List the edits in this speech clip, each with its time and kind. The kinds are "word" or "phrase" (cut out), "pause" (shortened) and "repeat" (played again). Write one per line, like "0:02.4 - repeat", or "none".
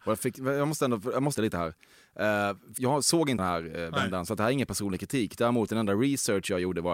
0:01.3 - word
0:02.8 - word
0:03.4 - word